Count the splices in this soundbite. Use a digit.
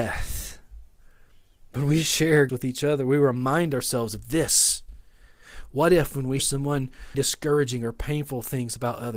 3